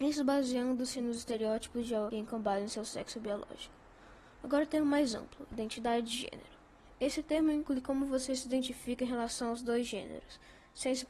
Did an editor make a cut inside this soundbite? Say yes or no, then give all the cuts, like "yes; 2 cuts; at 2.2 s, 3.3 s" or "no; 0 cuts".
no; 0 cuts